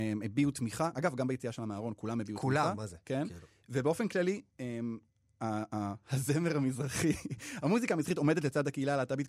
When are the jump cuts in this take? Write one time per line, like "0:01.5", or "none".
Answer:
none